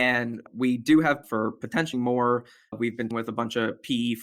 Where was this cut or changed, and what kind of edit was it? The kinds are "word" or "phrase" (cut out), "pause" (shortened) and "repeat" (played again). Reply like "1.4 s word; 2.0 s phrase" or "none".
1.2 s word; 1.9 s word; 3.1 s word